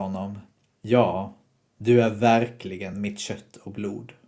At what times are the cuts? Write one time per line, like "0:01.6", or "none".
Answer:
none